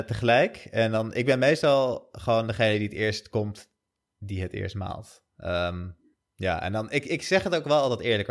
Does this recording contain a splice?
no; 0 cuts

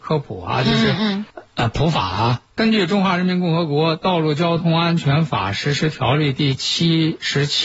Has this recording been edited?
yes; 1 cut; at 1.3 s

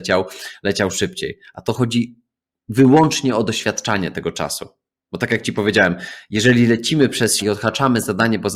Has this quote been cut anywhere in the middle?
yes; 1 cut; at 7.4 s

